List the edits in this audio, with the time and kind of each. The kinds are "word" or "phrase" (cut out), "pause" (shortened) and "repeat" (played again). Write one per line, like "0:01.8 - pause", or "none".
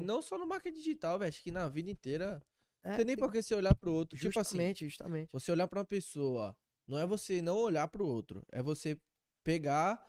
none